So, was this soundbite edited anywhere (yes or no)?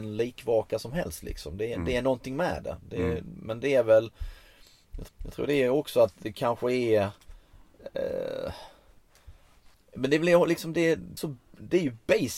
yes